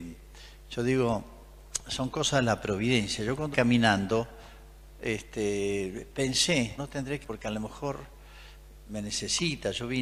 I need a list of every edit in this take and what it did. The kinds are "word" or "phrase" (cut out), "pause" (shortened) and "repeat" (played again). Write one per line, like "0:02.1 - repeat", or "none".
0:03.5 - word
0:06.8 - word
0:07.2 - word